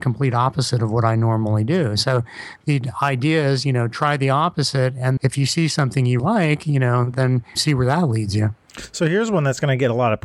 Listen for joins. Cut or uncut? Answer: cut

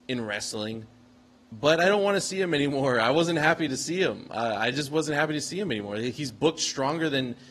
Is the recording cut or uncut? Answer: uncut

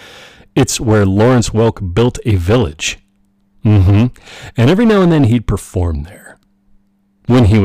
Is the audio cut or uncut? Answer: uncut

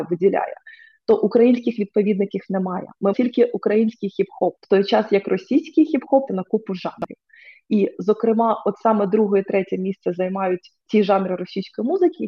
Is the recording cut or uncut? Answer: cut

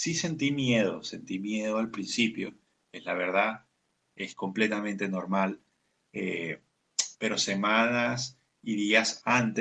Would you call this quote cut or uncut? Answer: uncut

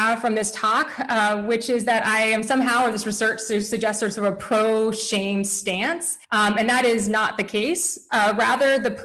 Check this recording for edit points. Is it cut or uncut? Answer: cut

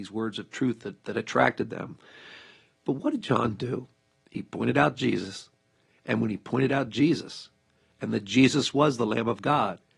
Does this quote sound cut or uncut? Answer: uncut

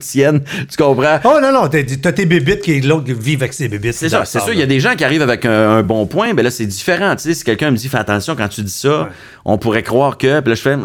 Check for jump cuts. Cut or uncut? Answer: uncut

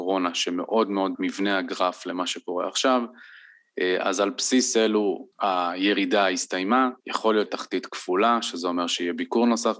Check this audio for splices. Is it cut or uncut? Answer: cut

